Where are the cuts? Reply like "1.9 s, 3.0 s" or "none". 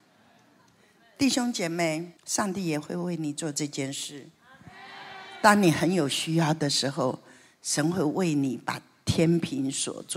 2.2 s

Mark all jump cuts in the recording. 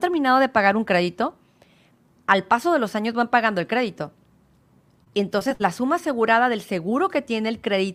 none

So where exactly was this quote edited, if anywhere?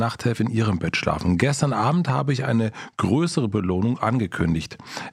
none

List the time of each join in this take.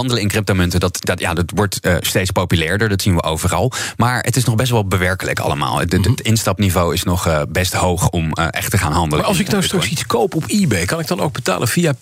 none

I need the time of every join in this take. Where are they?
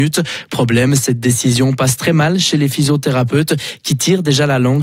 none

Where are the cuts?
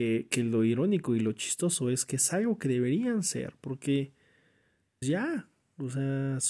5.0 s

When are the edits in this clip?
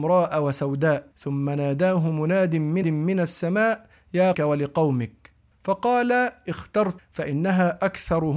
1.1 s, 2.8 s, 4.3 s, 7.0 s

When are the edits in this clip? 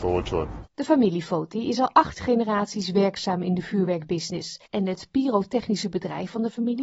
4.7 s

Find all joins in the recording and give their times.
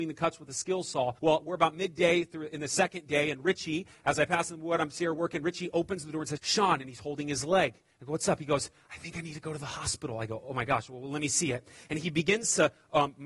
1.2 s, 6.4 s

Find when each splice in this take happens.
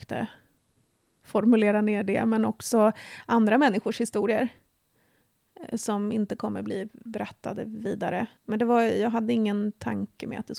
8.4 s

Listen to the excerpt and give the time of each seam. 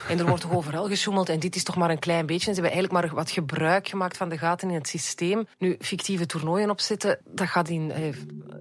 5.5 s, 7.2 s

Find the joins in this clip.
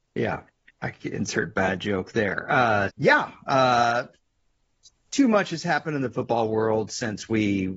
2.9 s

